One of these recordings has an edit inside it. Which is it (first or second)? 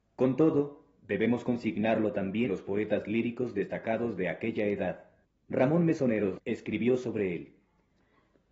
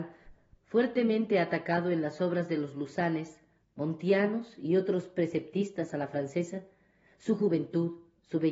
first